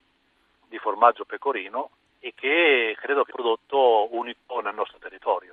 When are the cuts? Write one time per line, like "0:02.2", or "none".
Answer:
0:02.1
0:03.3